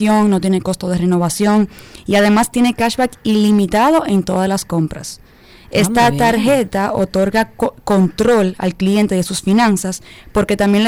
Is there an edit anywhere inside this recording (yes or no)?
no